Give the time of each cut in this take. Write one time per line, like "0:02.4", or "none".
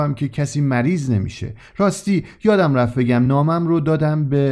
none